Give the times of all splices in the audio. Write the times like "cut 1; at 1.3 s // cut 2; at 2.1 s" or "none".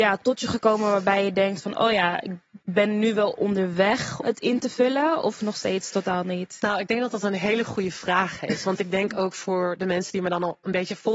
cut 1; at 2.6 s // cut 2; at 4.2 s